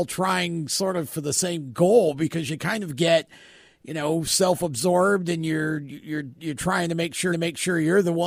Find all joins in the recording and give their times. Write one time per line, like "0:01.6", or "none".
0:07.3